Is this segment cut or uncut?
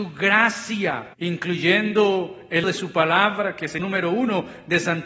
cut